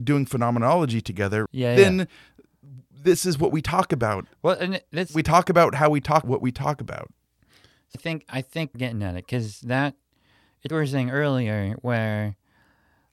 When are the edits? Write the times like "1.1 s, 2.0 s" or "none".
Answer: 1.5 s, 6.2 s, 7.9 s, 8.7 s, 10.7 s